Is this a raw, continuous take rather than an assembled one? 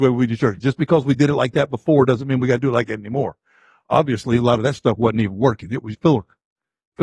no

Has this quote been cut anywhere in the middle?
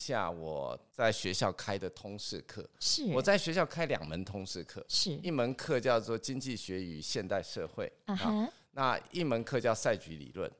no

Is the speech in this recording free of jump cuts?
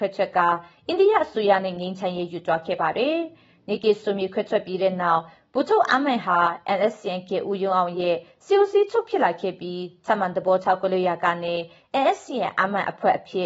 yes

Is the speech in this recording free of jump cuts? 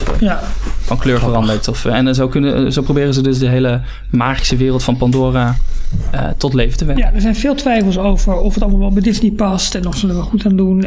yes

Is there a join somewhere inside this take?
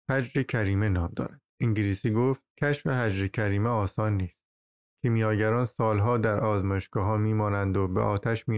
yes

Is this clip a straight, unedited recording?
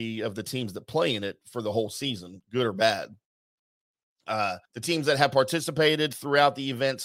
no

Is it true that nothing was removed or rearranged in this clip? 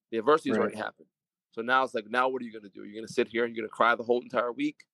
yes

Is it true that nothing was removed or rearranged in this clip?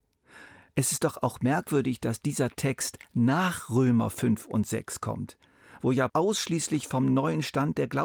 no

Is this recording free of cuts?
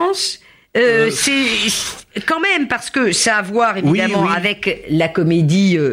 yes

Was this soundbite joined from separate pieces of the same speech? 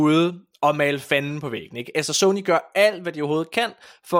no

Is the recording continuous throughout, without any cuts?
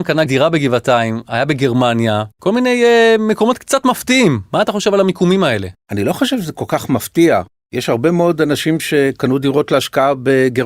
no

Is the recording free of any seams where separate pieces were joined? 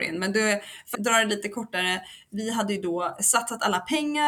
no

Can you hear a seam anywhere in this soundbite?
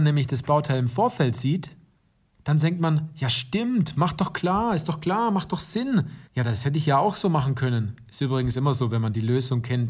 yes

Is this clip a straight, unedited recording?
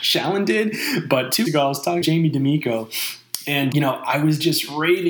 no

